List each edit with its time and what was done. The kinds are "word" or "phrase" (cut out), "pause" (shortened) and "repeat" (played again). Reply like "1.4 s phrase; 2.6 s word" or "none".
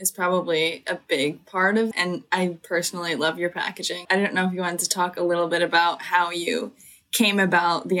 1.9 s word; 4.0 s word